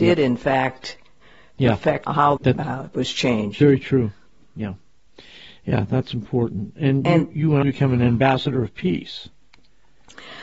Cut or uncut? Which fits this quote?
cut